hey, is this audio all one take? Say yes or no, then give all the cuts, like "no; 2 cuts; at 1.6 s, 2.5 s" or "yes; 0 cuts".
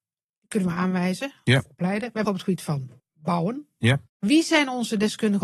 no; 3 cuts; at 2.2 s, 3.0 s, 4.1 s